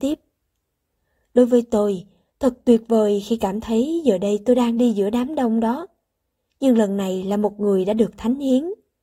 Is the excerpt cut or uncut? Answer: uncut